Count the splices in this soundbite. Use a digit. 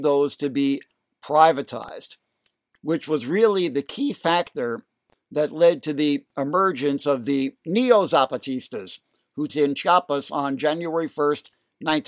1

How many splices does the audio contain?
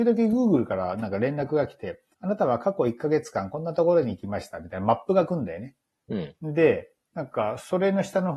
2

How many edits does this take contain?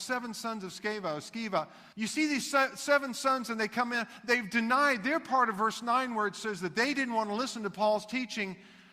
1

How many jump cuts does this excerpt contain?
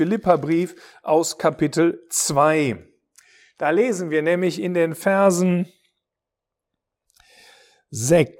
0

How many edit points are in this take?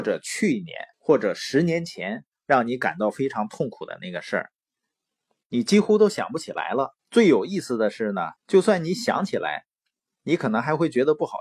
3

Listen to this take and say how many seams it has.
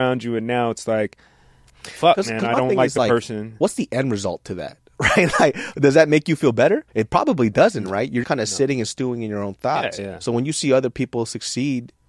3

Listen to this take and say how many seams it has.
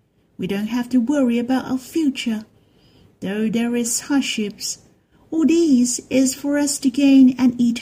0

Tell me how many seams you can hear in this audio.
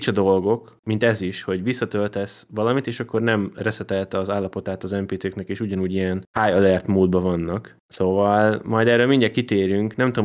0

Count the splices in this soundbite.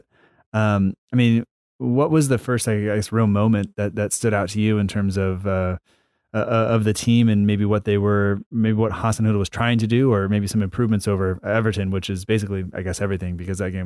1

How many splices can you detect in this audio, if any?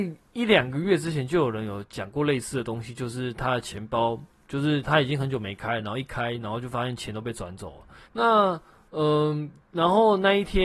2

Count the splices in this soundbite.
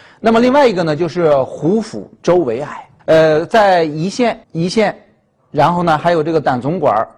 2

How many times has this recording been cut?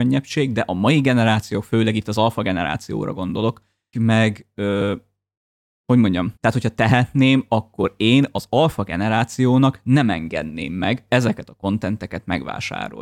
3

